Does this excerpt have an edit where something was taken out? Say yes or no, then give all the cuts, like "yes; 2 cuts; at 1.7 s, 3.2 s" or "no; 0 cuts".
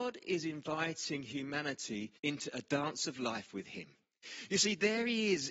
yes; 1 cut; at 2.2 s